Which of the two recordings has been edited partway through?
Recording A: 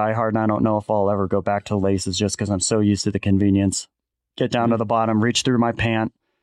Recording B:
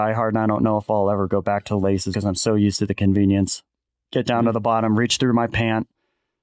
B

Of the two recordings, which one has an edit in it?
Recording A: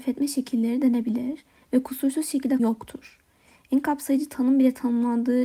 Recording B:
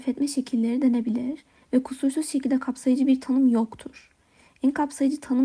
A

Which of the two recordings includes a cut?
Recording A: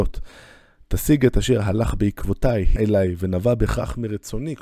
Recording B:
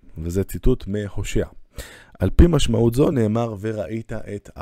A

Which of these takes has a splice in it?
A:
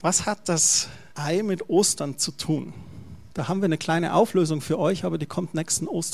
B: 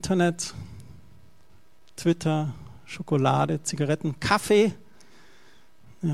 A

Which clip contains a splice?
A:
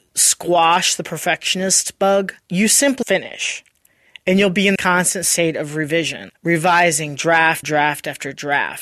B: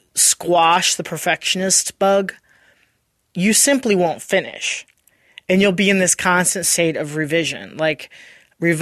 A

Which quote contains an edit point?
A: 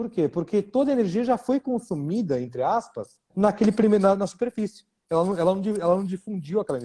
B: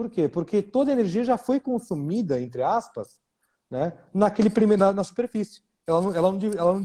A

